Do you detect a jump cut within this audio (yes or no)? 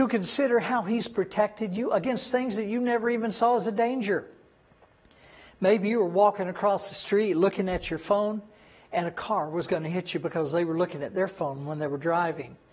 no